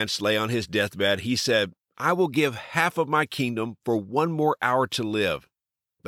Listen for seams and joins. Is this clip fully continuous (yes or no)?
yes